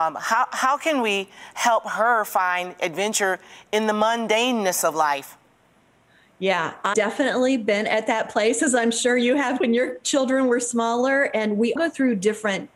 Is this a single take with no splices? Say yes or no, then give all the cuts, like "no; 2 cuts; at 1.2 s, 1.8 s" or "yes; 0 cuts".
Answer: no; 3 cuts; at 6.9 s, 9.6 s, 11.8 s